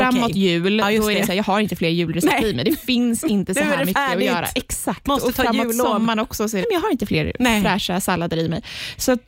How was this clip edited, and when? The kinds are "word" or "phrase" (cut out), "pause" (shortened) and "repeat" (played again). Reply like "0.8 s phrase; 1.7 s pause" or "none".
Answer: 6.6 s phrase

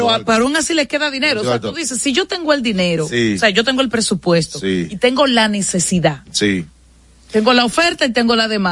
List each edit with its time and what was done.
none

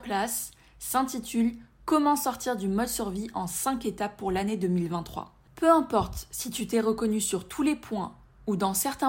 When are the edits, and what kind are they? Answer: none

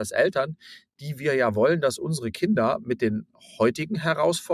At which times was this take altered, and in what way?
none

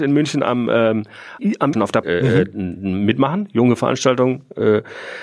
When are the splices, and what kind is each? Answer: 1.4 s word; 1.7 s word; 2.0 s word

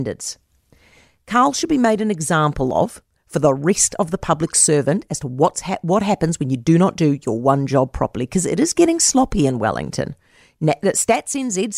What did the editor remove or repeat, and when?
none

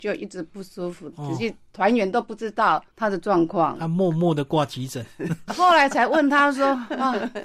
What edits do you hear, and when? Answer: 1.1 s phrase; 2.9 s pause; 5.5 s word

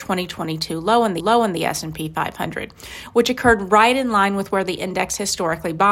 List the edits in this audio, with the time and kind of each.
1.2 s repeat

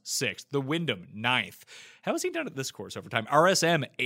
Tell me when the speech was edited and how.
none

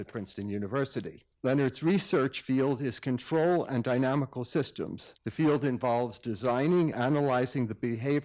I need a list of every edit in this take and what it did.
1.3 s pause; 5.2 s pause; 6.9 s word

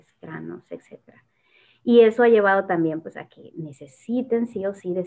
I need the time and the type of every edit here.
none

